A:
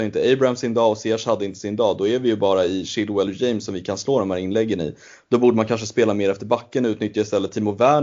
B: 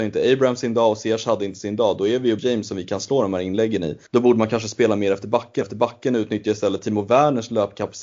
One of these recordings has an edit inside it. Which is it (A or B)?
B